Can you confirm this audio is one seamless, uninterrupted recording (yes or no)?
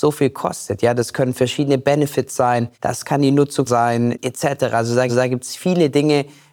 no